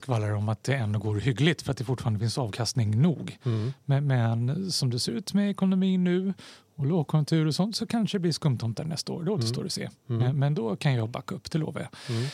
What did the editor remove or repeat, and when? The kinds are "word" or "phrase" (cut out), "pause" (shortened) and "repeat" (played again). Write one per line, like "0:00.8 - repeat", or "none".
none